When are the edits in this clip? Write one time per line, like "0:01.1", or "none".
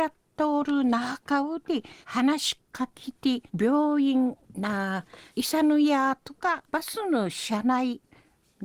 0:02.0
0:03.5
0:05.3
0:06.7